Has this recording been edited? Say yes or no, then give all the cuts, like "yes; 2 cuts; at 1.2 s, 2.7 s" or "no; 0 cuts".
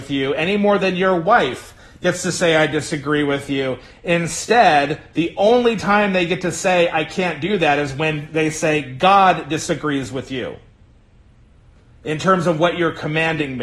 no; 0 cuts